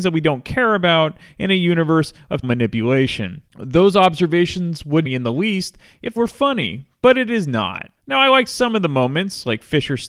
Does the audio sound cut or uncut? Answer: cut